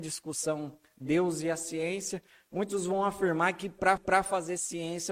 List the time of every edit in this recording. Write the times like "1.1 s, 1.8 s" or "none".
4.0 s